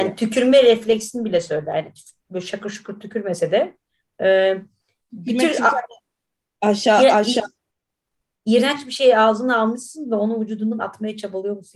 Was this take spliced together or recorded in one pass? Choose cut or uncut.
uncut